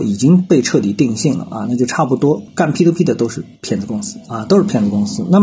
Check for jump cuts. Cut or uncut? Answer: cut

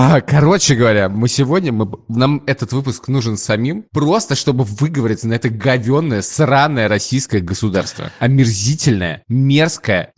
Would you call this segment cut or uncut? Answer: uncut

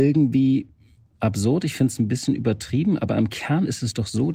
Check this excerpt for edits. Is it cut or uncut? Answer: uncut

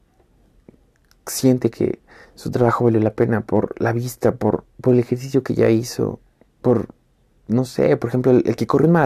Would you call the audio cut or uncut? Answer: cut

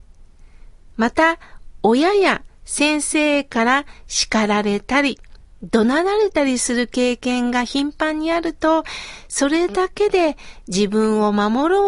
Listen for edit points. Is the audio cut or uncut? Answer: uncut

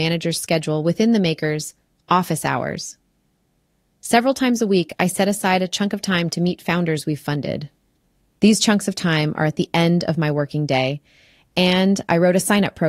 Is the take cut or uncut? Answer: uncut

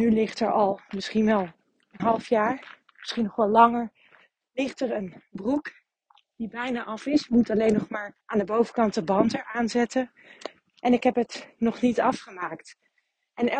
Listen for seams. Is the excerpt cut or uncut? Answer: cut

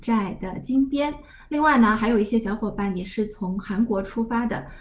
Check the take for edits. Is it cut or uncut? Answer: uncut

